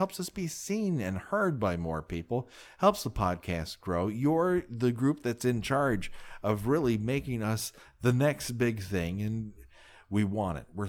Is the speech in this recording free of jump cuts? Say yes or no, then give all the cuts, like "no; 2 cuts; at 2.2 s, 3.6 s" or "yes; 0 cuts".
yes; 0 cuts